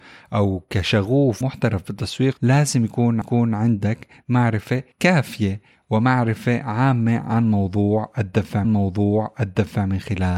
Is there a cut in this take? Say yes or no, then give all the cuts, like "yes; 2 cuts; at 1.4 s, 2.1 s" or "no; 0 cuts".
yes; 5 cuts; at 1.4 s, 2.4 s, 3.2 s, 4.9 s, 8.6 s